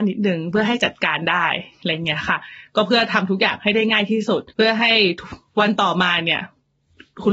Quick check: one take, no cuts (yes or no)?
no